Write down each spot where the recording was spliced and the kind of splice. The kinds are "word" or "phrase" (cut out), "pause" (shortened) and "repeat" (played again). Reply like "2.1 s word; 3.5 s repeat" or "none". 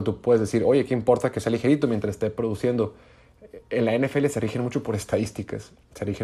none